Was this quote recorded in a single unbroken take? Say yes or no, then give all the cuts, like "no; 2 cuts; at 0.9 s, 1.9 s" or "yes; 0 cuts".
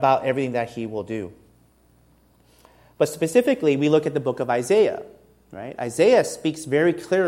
yes; 0 cuts